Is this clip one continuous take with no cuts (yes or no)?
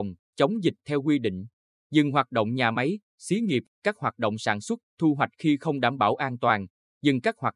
yes